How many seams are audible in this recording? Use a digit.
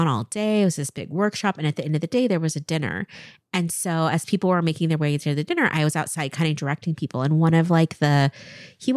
0